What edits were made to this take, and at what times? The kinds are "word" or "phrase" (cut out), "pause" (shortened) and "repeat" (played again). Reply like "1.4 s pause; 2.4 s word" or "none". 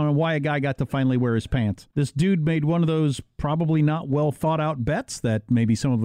1.9 s pause